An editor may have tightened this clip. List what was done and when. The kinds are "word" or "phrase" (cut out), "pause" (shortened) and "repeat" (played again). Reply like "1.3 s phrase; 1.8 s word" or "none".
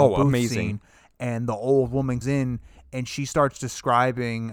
2.2 s word